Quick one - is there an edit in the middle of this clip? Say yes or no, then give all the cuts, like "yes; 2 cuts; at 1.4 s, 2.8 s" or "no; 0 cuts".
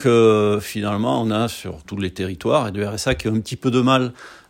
yes; 2 cuts; at 1.8 s, 2.7 s